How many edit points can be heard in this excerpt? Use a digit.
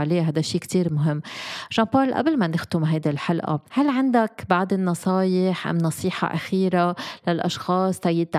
1